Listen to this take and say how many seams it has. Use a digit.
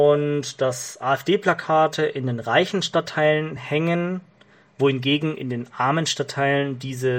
0